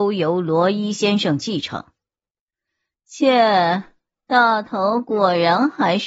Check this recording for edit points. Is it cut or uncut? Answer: uncut